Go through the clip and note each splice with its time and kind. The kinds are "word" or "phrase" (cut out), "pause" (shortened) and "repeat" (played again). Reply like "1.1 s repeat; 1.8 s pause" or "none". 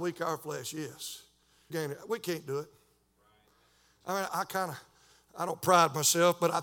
1.7 s word; 4.3 s word